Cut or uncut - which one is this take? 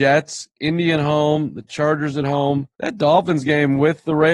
cut